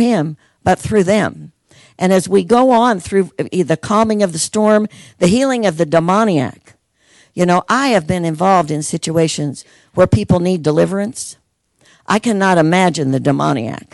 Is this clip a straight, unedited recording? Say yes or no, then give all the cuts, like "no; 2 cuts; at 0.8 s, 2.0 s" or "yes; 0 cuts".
yes; 0 cuts